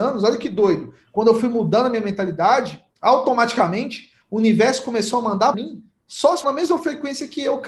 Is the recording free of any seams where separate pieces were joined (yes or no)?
no